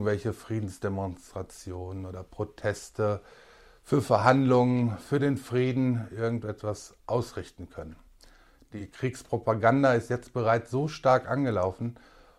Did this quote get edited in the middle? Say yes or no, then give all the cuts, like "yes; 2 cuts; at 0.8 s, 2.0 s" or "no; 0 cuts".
no; 0 cuts